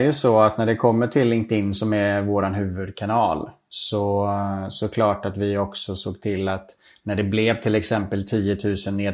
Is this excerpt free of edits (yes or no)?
yes